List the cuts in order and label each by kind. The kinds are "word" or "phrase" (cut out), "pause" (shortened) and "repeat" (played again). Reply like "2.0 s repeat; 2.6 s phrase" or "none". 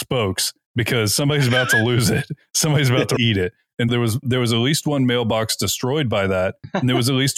3.2 s word; 3.9 s word; 4.2 s word